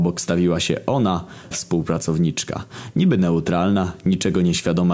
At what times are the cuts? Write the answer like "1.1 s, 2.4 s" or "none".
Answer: 1.5 s